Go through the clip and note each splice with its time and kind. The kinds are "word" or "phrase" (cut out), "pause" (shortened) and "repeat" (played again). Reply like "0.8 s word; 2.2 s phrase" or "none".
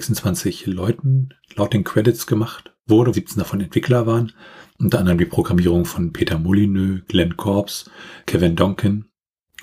3.1 s word